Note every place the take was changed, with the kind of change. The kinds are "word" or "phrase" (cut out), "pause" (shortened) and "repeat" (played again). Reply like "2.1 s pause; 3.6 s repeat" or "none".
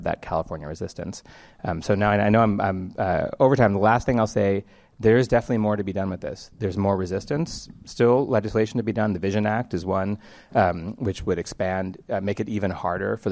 none